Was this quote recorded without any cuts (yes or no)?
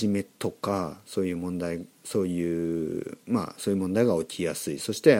no